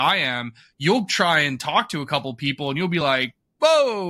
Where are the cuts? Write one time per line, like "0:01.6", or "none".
none